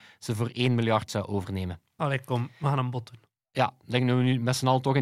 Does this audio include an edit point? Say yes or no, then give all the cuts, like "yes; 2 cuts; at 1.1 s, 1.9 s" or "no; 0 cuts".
no; 0 cuts